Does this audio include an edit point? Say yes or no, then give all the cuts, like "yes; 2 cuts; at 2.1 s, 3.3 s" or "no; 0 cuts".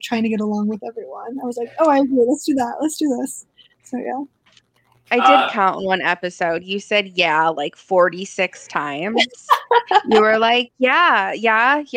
no; 0 cuts